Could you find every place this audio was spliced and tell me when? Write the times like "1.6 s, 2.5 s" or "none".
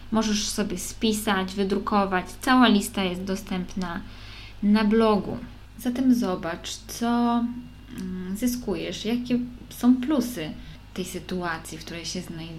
none